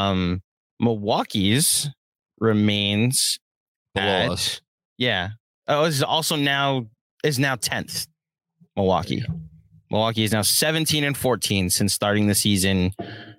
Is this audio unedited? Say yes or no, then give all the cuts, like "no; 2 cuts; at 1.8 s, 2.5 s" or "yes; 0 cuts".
yes; 0 cuts